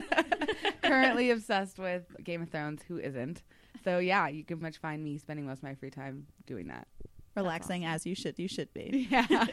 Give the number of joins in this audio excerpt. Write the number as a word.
four